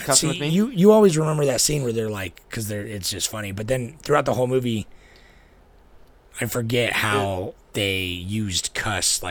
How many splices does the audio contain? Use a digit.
0